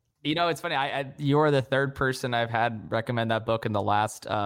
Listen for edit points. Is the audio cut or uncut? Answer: uncut